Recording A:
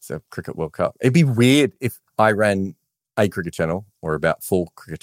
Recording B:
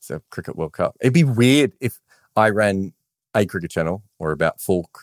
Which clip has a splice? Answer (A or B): A